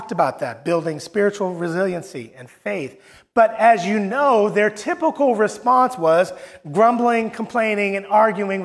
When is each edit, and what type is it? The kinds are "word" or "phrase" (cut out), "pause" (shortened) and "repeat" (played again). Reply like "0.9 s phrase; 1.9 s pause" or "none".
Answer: none